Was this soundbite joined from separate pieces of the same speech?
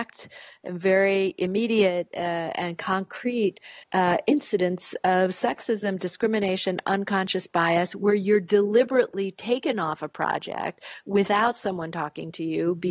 yes; 1 cut; at 3.8 s

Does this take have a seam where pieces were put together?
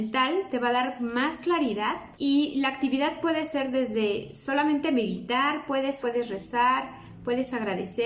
yes; 2 cuts; at 2.1 s, 6.0 s

